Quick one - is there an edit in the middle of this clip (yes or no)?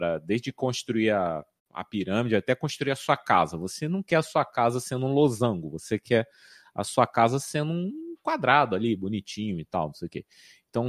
no